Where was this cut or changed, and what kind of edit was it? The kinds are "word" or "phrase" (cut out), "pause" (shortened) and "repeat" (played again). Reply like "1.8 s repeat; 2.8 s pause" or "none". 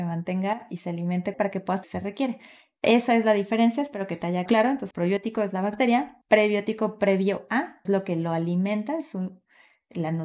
1.3 s word; 1.8 s phrase; 4.5 s word; 4.9 s word; 6.2 s pause; 7.8 s phrase